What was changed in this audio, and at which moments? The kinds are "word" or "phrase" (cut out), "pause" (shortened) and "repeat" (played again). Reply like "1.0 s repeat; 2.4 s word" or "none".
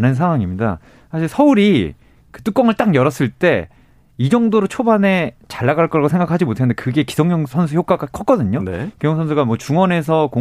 none